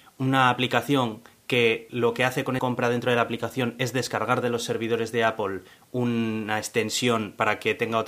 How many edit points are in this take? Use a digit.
1